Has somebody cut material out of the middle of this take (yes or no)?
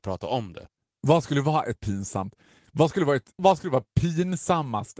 yes